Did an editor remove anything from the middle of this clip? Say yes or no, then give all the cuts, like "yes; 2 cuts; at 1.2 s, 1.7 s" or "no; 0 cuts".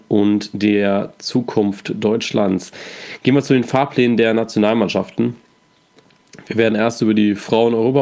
no; 0 cuts